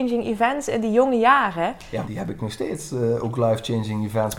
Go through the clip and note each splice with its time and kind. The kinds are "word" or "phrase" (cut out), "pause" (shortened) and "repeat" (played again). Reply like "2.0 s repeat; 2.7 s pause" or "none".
2.0 s word